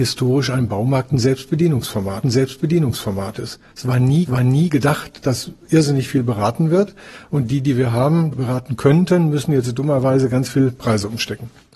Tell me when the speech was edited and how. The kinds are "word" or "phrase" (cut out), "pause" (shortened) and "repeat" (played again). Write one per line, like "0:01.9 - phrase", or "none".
0:02.2 - repeat
0:04.3 - repeat
0:08.3 - word